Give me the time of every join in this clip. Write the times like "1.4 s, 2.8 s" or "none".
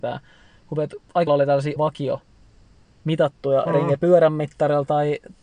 1.3 s, 1.8 s

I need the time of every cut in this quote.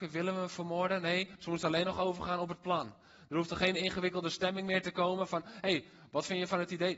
none

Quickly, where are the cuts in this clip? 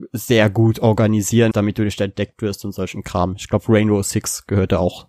1.5 s

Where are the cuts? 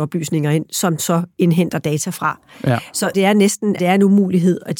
1.0 s, 3.1 s, 3.8 s

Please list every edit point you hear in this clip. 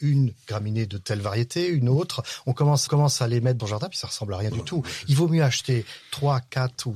2.9 s, 3.6 s

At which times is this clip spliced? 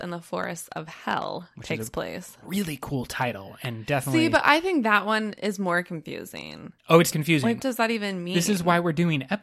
6.8 s, 7.1 s, 7.6 s

